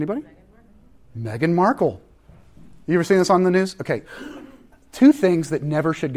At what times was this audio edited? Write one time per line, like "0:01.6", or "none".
0:04.0

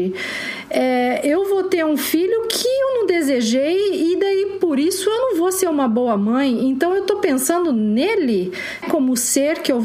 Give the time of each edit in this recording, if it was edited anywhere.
0:08.8

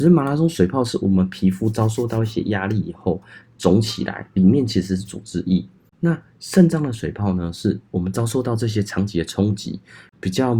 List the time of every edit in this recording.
none

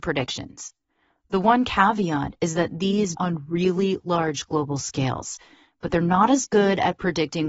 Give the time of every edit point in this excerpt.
0:03.1

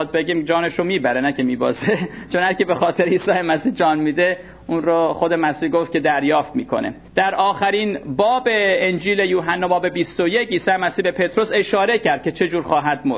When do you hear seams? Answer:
0:07.1

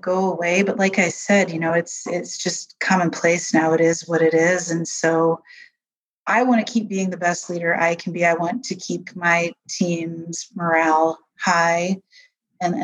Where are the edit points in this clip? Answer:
none

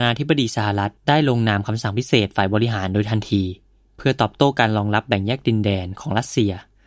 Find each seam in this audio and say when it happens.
0:01.0

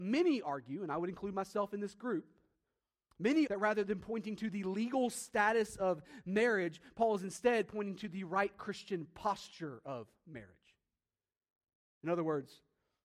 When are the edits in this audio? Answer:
0:03.5

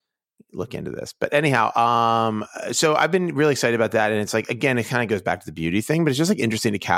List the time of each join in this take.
none

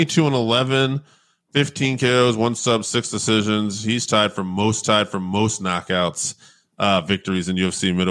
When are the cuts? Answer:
0:04.8

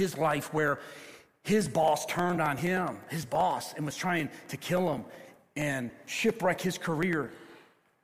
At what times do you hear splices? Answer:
none

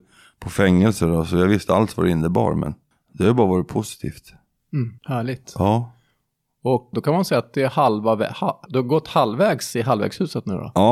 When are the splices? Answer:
0:01.7
0:02.9
0:05.0
0:06.9
0:08.7

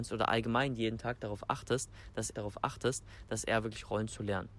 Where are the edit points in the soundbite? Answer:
0:02.3

